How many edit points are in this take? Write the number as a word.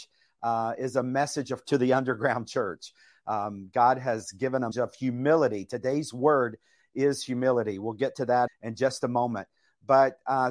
three